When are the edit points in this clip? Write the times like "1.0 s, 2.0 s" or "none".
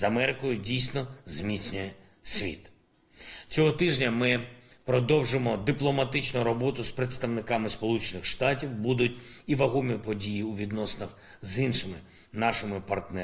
none

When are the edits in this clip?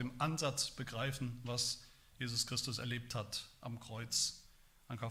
none

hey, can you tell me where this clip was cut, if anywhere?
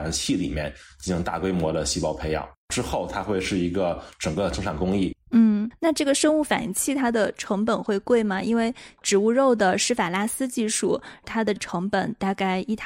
5.2 s

